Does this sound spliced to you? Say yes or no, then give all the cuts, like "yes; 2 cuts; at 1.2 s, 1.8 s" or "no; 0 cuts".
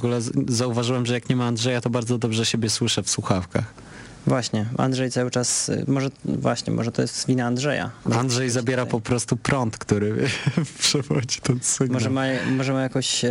no; 0 cuts